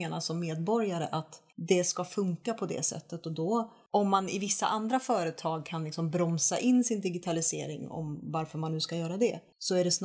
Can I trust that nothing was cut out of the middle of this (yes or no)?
yes